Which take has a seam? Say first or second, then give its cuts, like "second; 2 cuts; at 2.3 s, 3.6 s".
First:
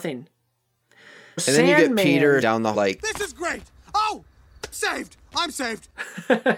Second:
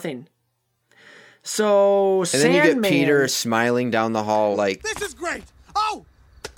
first; 4 cuts; at 1.4 s, 2.4 s, 2.7 s, 4.7 s